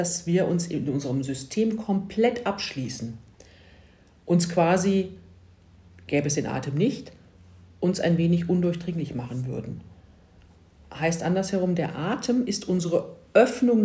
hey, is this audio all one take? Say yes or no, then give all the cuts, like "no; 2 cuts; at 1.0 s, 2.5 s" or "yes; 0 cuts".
yes; 0 cuts